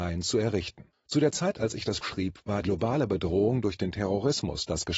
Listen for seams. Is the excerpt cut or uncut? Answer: cut